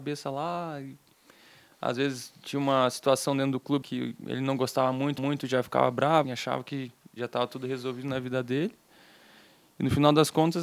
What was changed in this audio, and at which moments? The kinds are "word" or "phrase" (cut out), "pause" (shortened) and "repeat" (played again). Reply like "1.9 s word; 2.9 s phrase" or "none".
3.8 s word; 5.2 s repeat; 6.2 s word